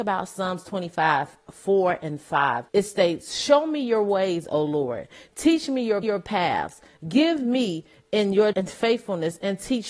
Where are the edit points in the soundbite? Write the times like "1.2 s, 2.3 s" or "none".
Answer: 2.7 s, 6.0 s, 8.5 s

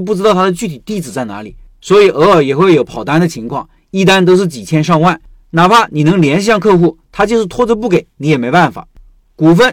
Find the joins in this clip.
none

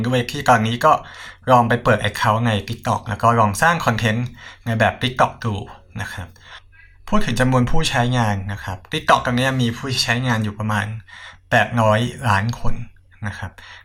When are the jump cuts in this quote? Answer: none

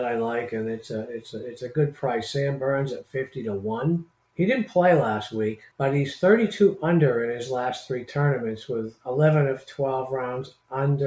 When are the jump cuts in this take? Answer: 4.2 s, 5.7 s

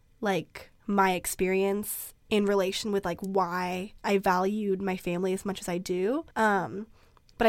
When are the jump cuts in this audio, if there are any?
2.2 s, 4.0 s, 6.3 s

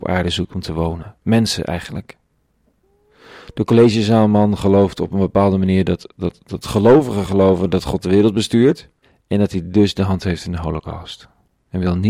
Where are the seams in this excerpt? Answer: 9.0 s

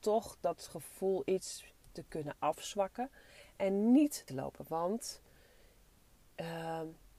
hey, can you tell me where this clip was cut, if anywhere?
4.3 s

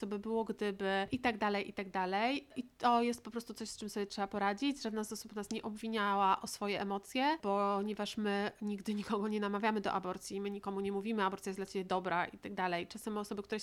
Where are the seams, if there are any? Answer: none

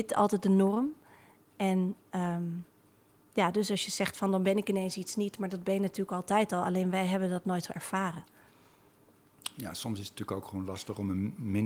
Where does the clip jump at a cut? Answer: none

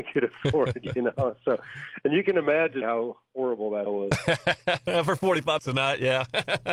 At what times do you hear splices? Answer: 2.8 s, 3.9 s, 5.6 s

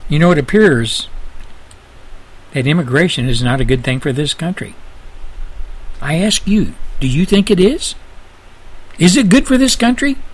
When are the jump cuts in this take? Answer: none

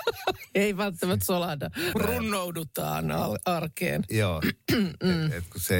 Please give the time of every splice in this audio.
1.9 s

